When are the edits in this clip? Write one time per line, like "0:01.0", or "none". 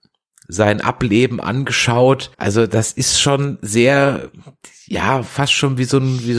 0:02.3